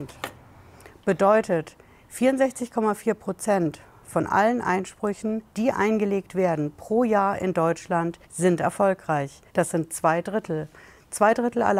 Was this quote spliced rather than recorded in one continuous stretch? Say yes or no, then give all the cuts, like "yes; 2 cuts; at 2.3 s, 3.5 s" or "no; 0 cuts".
yes; 3 cuts; at 5.5 s, 8.2 s, 9.5 s